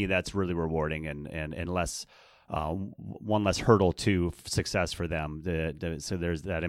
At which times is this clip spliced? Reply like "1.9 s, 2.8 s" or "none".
none